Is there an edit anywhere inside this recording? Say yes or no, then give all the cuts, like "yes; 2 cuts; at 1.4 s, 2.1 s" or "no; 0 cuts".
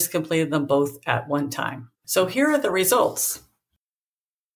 yes; 1 cut; at 1.9 s